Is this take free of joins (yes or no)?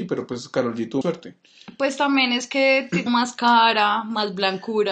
no